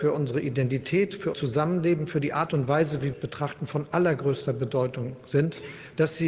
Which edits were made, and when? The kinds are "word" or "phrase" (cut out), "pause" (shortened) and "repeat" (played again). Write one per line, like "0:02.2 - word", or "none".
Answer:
0:01.3 - word
0:03.1 - phrase

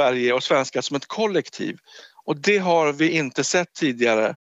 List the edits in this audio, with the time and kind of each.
none

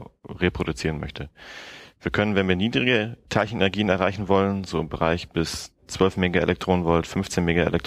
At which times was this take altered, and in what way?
0:05.8 - pause

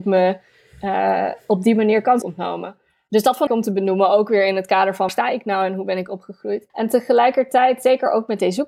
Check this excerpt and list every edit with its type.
0:02.2 - word
0:03.5 - phrase
0:05.1 - word
0:06.7 - pause

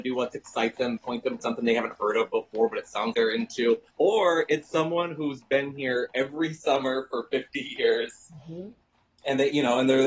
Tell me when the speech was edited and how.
0:01.0 - word
0:01.4 - word
0:03.1 - word
0:03.9 - pause
0:08.8 - pause

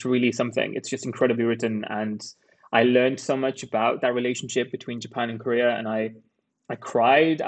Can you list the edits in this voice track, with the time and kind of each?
none

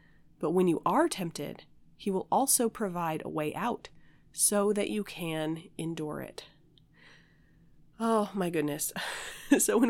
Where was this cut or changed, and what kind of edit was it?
none

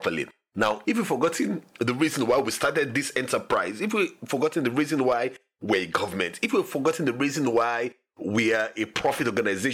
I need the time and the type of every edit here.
none

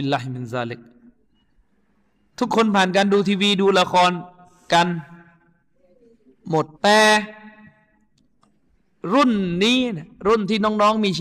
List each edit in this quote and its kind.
0:06.7 - pause

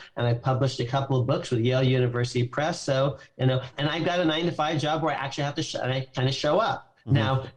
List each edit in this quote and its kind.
0:03.7 - word

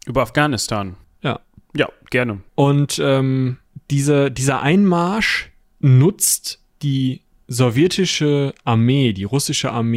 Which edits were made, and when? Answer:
0:02.5 - pause

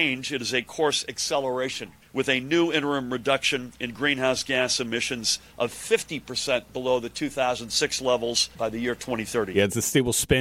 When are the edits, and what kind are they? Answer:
0:05.5 - pause

